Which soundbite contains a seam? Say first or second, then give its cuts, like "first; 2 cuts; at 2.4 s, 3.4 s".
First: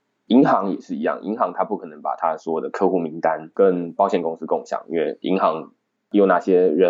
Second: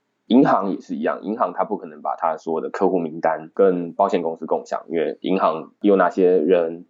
second; 1 cut; at 5.8 s